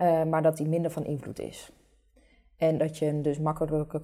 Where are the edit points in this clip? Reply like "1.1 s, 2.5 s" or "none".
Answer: none